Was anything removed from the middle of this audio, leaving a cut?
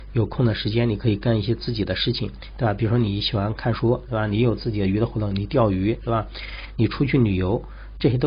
yes; 1 cut; at 6.0 s

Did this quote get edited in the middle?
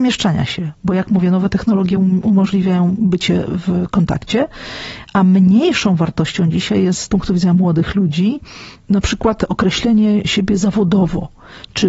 no; 0 cuts

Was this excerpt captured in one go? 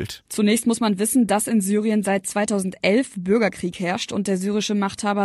yes; 0 cuts

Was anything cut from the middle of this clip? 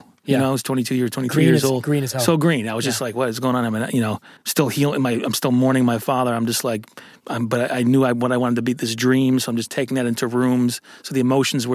yes; 1 cut; at 4.4 s

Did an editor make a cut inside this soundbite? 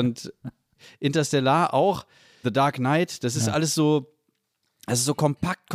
yes; 1 cut; at 2.4 s

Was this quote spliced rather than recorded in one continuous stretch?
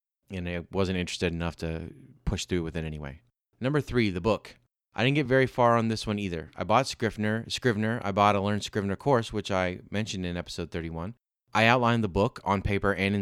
no; 0 cuts

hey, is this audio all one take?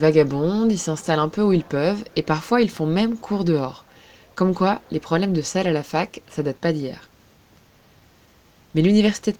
yes; 0 cuts

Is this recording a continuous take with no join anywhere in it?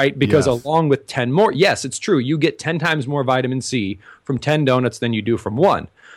yes; 0 cuts

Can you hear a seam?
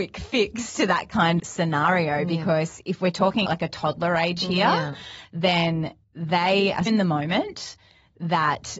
yes; 4 cuts; at 1.4 s, 3.5 s, 6.0 s, 6.9 s

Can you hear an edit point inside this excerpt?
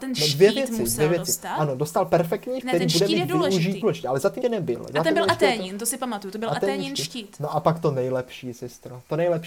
yes; 3 cuts; at 2.6 s, 3.8 s, 4.4 s

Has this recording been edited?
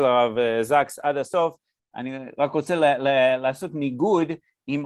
no; 0 cuts

